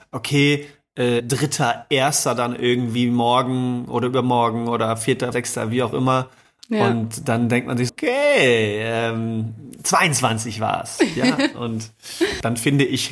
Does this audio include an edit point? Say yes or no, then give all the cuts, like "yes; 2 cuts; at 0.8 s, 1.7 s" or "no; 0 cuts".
yes; 3 cuts; at 1.2 s, 5.3 s, 7.9 s